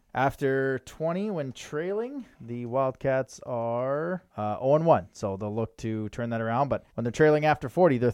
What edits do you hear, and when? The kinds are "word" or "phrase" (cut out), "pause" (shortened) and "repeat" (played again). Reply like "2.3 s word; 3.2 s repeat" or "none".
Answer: 2.3 s pause; 4.3 s pause; 6.9 s pause